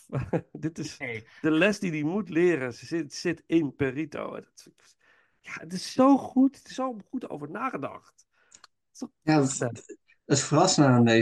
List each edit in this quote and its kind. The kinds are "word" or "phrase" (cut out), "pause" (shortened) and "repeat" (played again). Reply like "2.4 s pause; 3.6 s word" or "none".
none

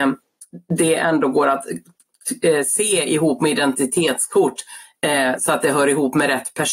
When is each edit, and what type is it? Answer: none

